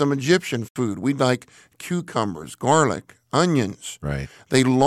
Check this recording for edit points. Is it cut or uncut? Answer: uncut